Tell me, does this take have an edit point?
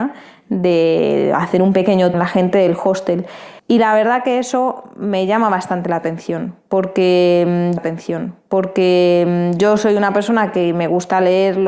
yes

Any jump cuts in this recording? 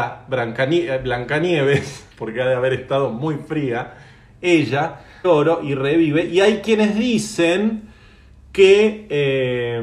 yes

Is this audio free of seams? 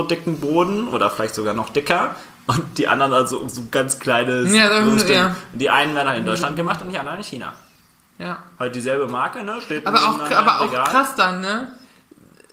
yes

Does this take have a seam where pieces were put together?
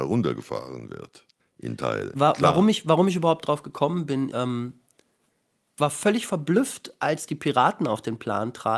yes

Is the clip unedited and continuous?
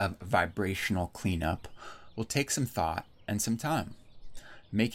yes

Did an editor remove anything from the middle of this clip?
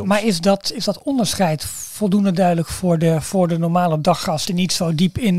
no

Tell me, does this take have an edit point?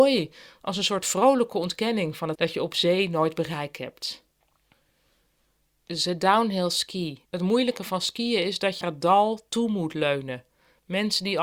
yes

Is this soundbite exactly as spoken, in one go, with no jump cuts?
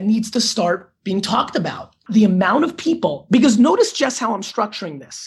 yes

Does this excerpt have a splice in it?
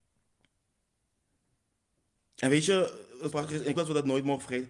yes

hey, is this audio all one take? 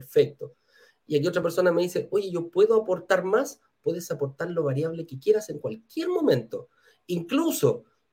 yes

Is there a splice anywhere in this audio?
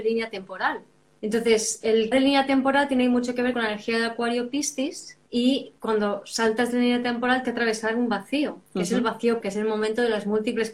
yes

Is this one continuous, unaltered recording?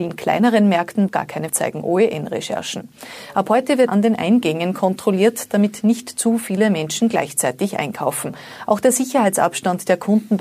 no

